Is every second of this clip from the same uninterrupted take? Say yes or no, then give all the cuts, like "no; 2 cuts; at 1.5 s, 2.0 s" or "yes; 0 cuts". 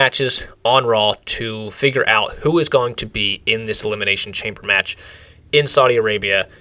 yes; 0 cuts